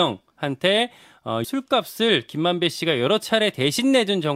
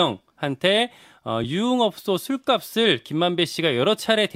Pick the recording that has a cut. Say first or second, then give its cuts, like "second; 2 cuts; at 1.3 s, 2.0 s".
first; 1 cut; at 1.4 s